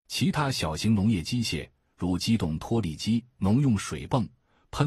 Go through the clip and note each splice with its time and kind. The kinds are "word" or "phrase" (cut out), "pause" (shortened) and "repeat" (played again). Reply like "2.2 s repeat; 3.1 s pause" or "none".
none